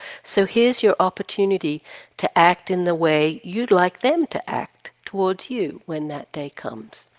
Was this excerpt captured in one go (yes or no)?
yes